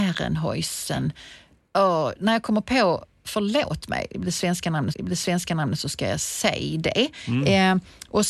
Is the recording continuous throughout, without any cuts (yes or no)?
no